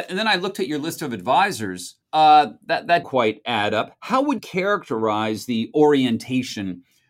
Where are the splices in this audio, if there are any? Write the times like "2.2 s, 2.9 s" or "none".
2.0 s, 3.0 s, 4.4 s